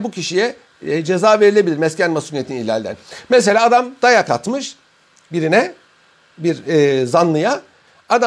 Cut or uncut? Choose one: uncut